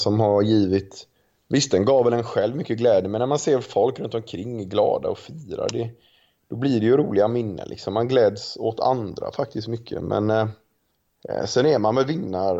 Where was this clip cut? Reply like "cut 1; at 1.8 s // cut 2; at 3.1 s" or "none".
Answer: none